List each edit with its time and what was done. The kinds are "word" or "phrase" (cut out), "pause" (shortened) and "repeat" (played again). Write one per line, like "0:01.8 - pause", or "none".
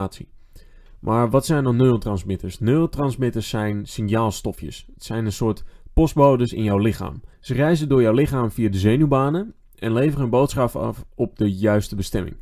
0:07.3 - pause

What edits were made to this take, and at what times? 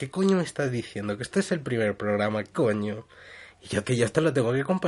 0:02.5 - word
0:03.8 - phrase

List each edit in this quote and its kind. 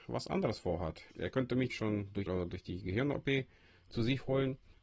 0:01.1 - pause
0:01.7 - word
0:02.3 - phrase

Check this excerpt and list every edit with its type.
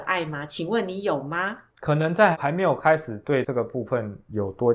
0:01.7 - pause

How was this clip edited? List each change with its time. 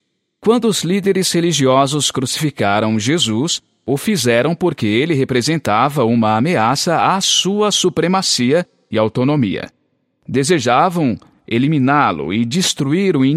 none

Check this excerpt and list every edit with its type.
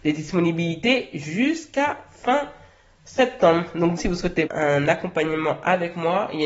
0:04.0 - word
0:04.5 - word

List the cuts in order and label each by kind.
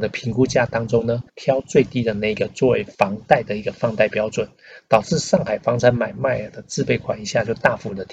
0:01.3 - pause
0:02.9 - pause

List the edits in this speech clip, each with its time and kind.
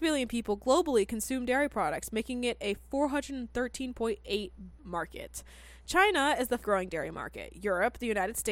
0:04.8 - word
0:06.6 - word

